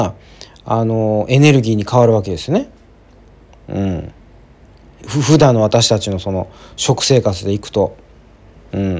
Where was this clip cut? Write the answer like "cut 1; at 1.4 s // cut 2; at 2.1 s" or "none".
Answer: none

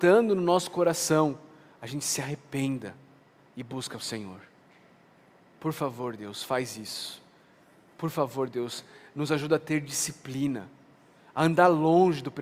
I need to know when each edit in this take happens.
none

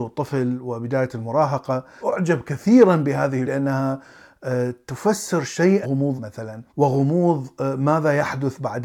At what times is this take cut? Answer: cut 1; at 2.0 s // cut 2; at 3.4 s // cut 3; at 5.8 s // cut 4; at 6.2 s // cut 5; at 6.7 s

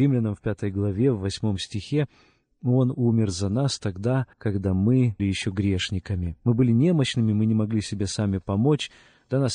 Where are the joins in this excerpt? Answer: cut 1; at 4.3 s // cut 2; at 5.2 s

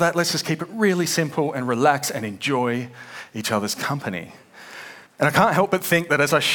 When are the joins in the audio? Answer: cut 1; at 5.1 s

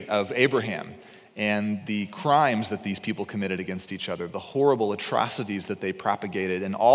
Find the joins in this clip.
none

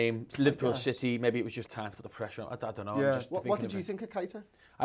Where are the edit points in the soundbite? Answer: cut 1; at 1.7 s

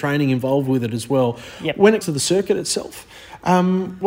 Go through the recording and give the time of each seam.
cut 1; at 2.0 s

